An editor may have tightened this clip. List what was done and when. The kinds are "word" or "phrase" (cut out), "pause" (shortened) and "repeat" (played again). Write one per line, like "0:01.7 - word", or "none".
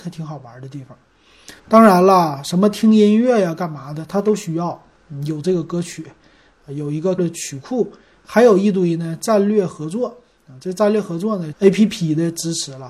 0:01.6 - pause
0:07.2 - word
0:11.5 - phrase